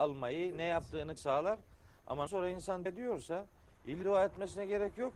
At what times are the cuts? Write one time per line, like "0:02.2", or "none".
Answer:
0:01.2
0:02.3
0:02.9
0:04.0